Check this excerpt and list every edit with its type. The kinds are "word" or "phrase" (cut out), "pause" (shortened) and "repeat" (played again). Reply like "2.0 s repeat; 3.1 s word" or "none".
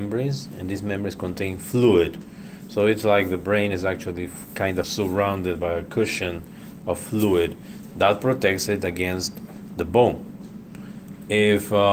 4.8 s phrase